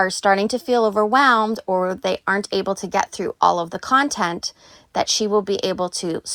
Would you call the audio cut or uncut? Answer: uncut